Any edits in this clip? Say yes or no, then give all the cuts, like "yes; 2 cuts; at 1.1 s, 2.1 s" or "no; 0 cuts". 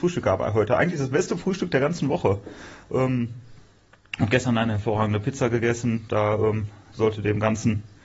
no; 0 cuts